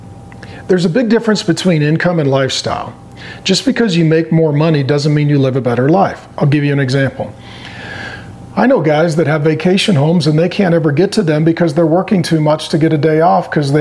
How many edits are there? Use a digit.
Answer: 0